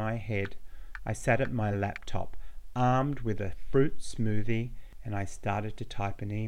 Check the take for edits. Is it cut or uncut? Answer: uncut